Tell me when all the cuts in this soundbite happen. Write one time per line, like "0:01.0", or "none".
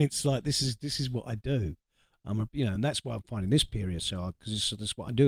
none